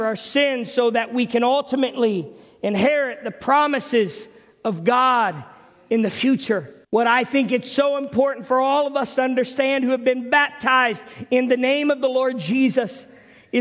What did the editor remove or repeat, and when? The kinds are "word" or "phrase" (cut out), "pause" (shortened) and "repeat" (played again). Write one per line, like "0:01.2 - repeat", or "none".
0:06.8 - pause